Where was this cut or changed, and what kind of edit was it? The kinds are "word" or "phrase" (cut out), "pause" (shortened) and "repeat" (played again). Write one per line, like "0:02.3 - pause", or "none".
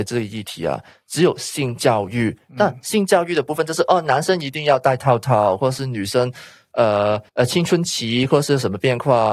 0:07.3 - pause